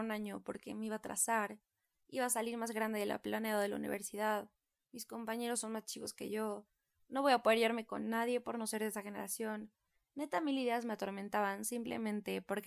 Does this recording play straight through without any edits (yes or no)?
yes